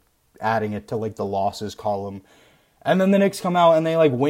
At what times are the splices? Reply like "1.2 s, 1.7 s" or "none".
none